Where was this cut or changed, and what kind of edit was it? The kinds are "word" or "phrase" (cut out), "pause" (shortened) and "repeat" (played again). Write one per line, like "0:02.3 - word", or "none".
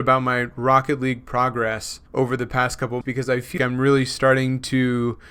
0:02.1 - pause
0:03.0 - word
0:03.6 - word